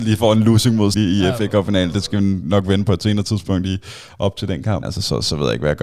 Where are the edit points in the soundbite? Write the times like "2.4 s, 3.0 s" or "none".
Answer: 0.9 s, 4.8 s